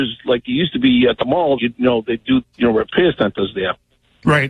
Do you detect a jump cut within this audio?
yes; 2 cuts; at 1.6 s, 2.4 s

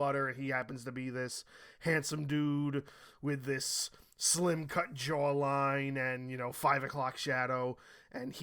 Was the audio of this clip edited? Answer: no; 0 cuts

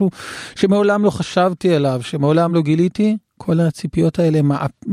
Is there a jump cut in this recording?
no; 0 cuts

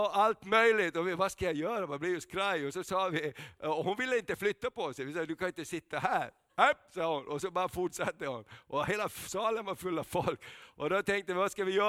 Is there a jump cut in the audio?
no; 0 cuts

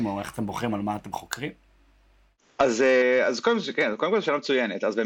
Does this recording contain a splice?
no; 0 cuts

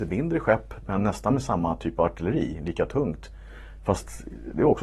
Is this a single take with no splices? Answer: yes; 0 cuts

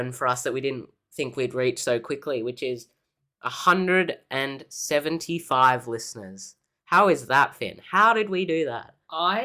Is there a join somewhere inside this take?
no; 0 cuts

